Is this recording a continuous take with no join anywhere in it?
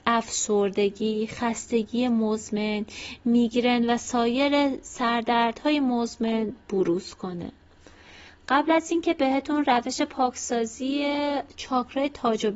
yes; 0 cuts

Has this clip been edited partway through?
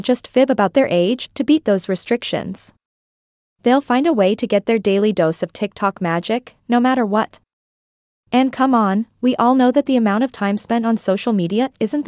no; 0 cuts

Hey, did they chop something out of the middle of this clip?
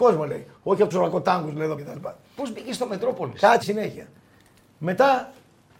yes; 3 cuts; at 0.9 s, 1.8 s, 3.6 s

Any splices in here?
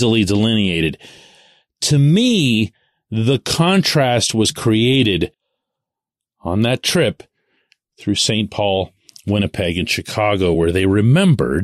no; 0 cuts

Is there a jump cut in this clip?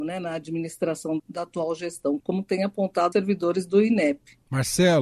yes; 3 cuts; at 1.2 s, 2.2 s, 3.1 s

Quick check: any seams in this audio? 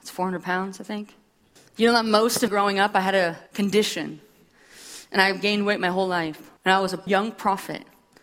yes; 5 cuts; at 1.6 s, 2.5 s, 3.5 s, 6.6 s, 7.1 s

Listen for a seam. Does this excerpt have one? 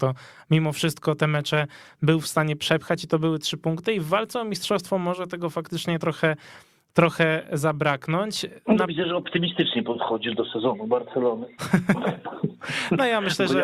no; 0 cuts

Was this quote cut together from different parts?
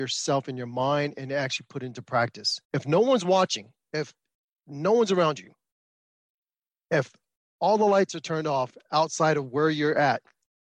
yes; 2 cuts; at 2.6 s, 4.3 s

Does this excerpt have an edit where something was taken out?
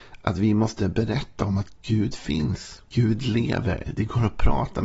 yes; 1 cut; at 2.9 s

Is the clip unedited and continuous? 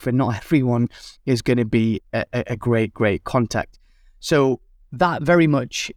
yes; 0 cuts

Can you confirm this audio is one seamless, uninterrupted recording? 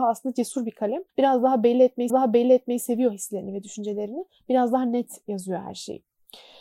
no; 2 cuts; at 1.1 s, 2.1 s

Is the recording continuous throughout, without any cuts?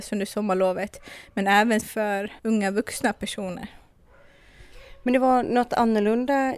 no; 2 cuts; at 1.8 s, 2.4 s

